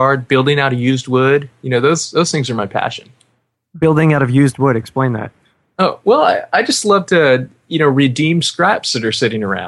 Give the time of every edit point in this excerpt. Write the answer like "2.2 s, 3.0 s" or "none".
none